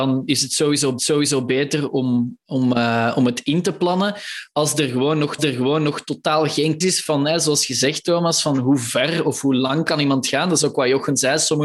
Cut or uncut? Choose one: cut